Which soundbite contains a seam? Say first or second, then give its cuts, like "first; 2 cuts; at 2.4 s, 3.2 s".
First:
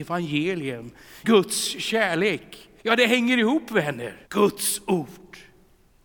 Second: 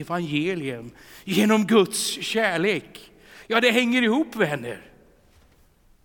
first; 3 cuts; at 1.2 s, 2.8 s, 4.3 s